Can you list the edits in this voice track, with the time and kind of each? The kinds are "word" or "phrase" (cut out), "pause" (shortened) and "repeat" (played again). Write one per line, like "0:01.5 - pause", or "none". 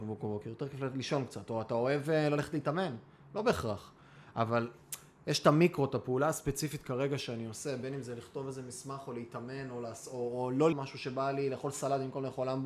0:10.7 - word